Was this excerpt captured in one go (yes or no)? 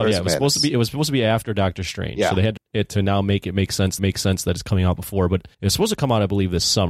no